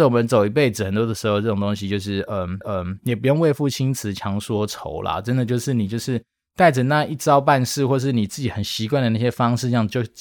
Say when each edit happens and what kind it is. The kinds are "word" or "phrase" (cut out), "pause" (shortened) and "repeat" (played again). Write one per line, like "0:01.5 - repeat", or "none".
0:02.6 - repeat

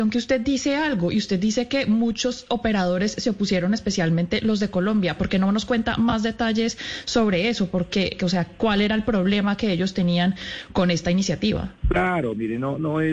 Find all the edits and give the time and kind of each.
0:11.8 - pause

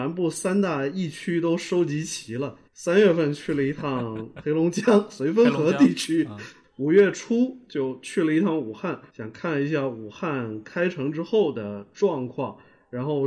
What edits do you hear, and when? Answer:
0:02.7 - pause
0:09.1 - pause

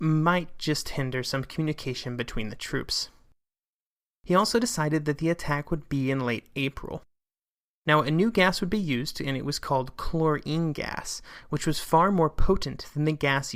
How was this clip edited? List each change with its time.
none

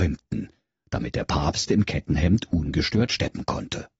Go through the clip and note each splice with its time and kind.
none

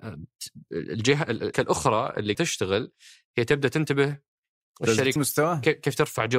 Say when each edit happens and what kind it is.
0:01.5 - word
0:02.3 - word
0:05.2 - word

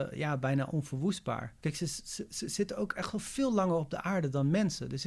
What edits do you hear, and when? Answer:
0:01.6 - pause

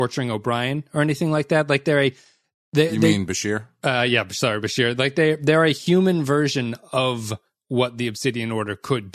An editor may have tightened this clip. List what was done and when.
none

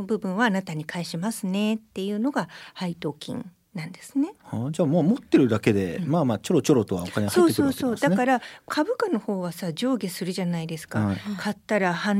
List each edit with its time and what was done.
none

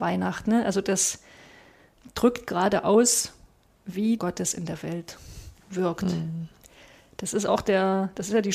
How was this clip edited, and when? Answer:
0:04.2 - phrase

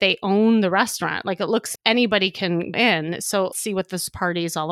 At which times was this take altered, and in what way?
0:01.8 - word
0:02.7 - word
0:03.5 - word

